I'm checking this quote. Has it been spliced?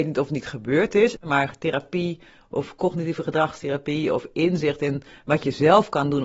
no; 0 cuts

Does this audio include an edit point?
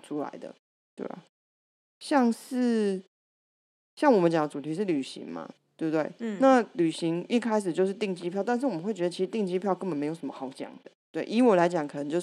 no; 0 cuts

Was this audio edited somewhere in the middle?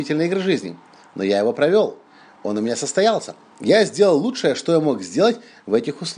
no; 0 cuts

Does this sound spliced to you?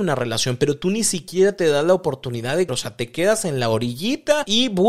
yes; 1 cut; at 2.7 s

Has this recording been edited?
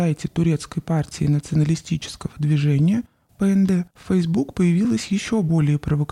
yes; 1 cut; at 3.9 s

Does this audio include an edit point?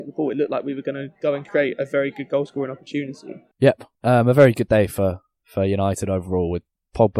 yes; 1 cut; at 3.5 s

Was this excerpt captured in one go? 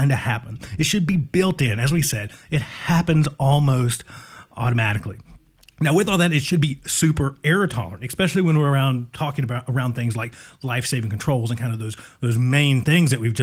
yes; 0 cuts

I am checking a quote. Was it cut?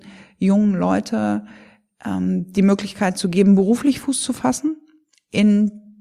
no; 0 cuts

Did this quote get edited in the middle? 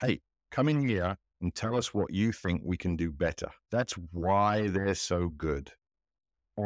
yes; 1 cut; at 3.6 s

